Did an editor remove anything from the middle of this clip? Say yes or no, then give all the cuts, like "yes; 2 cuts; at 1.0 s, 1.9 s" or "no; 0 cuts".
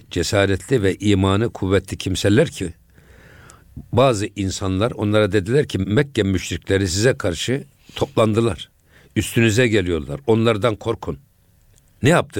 no; 0 cuts